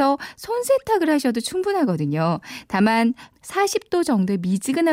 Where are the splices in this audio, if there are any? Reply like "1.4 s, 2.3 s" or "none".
3.3 s